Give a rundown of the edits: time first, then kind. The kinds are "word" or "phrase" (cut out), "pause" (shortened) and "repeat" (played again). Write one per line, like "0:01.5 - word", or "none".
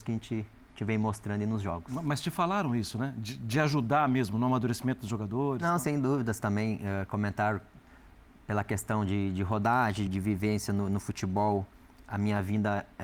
0:10.1 - word